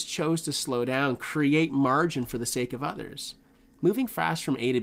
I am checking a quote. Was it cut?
no; 0 cuts

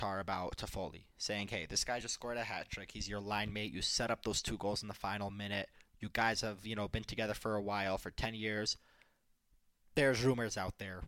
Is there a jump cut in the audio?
no; 0 cuts

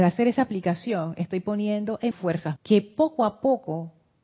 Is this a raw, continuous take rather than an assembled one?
no; 2 cuts; at 2.1 s, 2.6 s

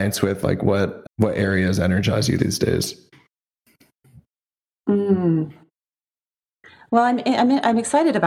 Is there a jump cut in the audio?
yes; 2 cuts; at 1.0 s, 2.4 s

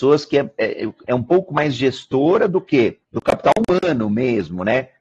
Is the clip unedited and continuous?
no; 1 cut; at 3.0 s

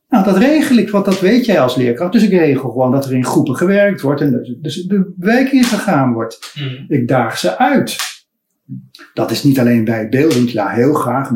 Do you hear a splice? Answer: no; 0 cuts

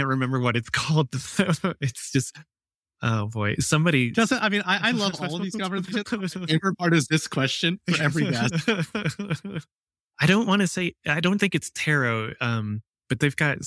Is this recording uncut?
yes; 0 cuts

